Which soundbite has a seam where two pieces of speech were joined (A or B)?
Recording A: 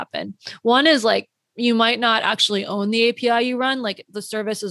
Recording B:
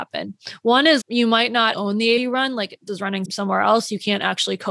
B